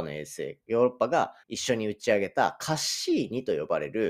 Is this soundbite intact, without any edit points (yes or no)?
no